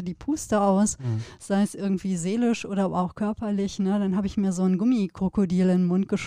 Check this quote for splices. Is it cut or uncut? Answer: uncut